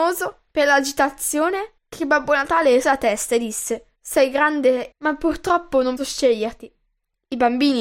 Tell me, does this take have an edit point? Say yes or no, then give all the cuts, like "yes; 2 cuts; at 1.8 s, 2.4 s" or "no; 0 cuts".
yes; 5 cuts; at 1.8 s, 2.8 s, 3.9 s, 4.9 s, 6.0 s